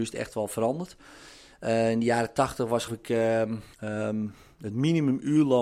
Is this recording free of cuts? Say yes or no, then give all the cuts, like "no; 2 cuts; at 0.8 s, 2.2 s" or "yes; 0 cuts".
no; 2 cuts; at 2.9 s, 3.7 s